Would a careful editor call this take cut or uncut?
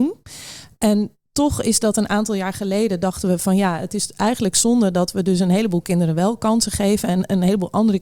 uncut